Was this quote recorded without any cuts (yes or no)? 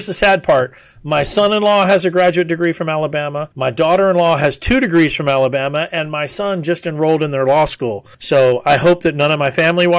no